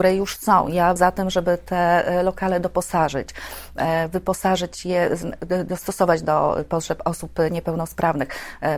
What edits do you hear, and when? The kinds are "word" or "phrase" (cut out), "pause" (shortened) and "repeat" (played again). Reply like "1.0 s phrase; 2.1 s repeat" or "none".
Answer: 1.0 s phrase